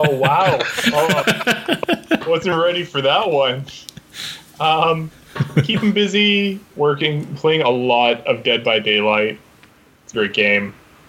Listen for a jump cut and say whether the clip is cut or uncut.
cut